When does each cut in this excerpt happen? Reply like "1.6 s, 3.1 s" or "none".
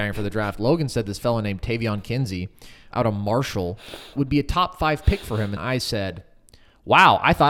2.9 s, 4.1 s, 5.6 s